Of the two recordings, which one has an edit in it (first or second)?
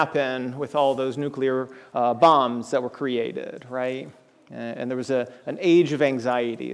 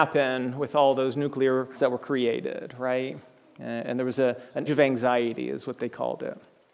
second